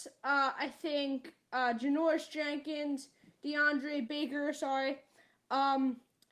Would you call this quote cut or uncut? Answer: cut